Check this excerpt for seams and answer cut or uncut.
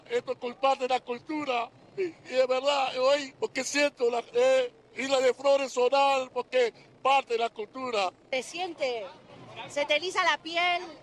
uncut